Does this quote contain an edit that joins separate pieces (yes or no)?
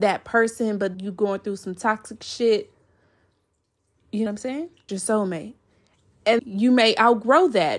yes